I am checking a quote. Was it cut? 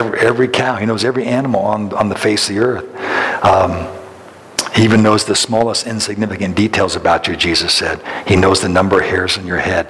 no; 0 cuts

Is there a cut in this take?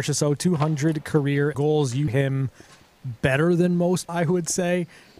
yes; 3 cuts; at 1.5 s, 2.1 s, 4.1 s

